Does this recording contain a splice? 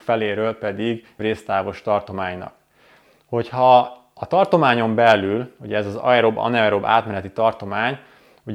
yes; 1 cut; at 1.2 s

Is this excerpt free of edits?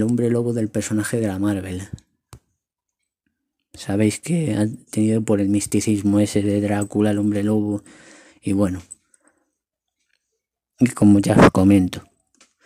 yes; 0 cuts

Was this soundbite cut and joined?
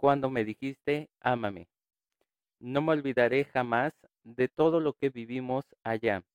no; 0 cuts

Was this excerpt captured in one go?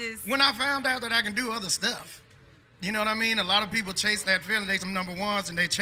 no; 1 cut; at 4.8 s

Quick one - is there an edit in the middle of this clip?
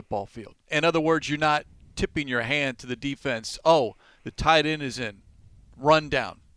no; 0 cuts

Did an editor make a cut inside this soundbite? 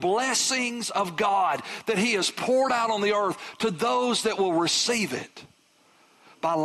no; 0 cuts

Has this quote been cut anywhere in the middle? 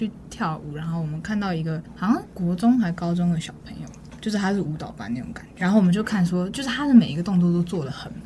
yes; 1 cut; at 5.6 s

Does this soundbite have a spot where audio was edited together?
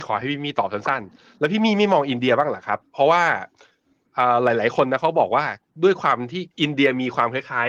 yes; 1 cut; at 6.5 s

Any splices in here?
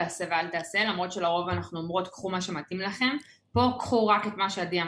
no; 0 cuts

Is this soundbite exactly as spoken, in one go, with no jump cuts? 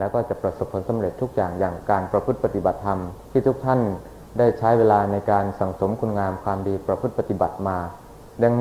no; 1 cut; at 3.2 s

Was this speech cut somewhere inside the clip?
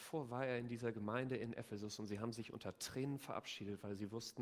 no; 0 cuts

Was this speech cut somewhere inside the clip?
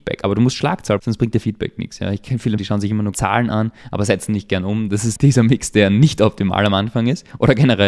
yes; 4 cuts; at 1.0 s, 2.6 s, 3.1 s, 5.2 s

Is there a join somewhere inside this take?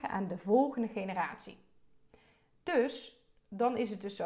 no; 0 cuts

